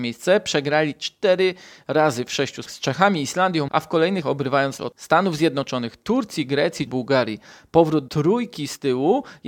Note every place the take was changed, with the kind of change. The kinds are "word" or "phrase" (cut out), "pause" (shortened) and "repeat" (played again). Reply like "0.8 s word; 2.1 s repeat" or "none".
2.7 s word; 3.7 s word; 4.2 s word; 4.8 s word; 6.9 s word; 8.1 s word